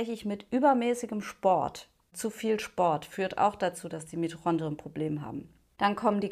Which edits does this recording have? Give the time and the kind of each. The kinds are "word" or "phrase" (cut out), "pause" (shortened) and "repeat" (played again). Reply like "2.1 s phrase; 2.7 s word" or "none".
none